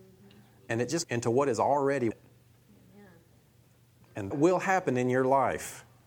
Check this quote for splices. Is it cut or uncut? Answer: cut